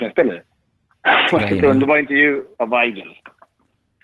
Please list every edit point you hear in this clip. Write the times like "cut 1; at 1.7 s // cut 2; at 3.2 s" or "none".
cut 1; at 2.5 s

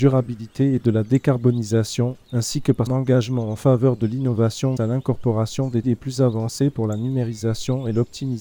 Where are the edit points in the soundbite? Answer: cut 1; at 2.2 s // cut 2; at 2.9 s // cut 3; at 4.8 s // cut 4; at 5.8 s

